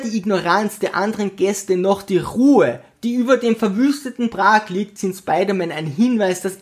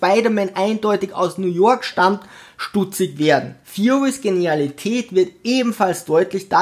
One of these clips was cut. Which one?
second; 1 cut; at 3.6 s

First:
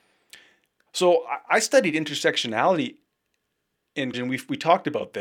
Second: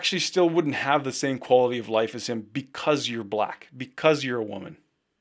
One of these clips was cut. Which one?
first; 1 cut; at 4.1 s

